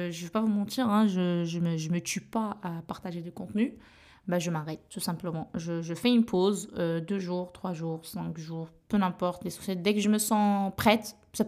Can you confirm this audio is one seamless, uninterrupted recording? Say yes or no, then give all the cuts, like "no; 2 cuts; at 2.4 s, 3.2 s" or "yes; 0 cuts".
yes; 0 cuts